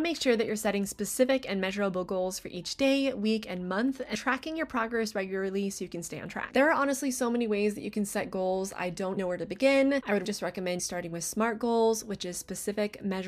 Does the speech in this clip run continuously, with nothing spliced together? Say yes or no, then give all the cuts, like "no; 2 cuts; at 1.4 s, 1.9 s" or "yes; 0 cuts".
no; 4 cuts; at 4.1 s, 9.2 s, 10.2 s, 10.8 s